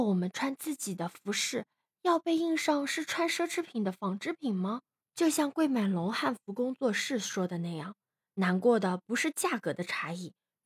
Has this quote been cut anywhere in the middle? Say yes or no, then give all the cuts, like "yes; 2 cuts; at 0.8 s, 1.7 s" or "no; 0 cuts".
no; 0 cuts